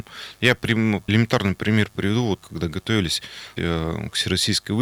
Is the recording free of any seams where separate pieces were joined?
no; 3 cuts; at 1.1 s, 2.4 s, 3.6 s

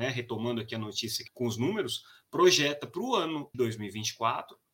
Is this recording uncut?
no; 2 cuts; at 1.3 s, 3.5 s

